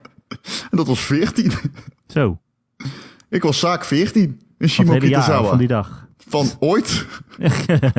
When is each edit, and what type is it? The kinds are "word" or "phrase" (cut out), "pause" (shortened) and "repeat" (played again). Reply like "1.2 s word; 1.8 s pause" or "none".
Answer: none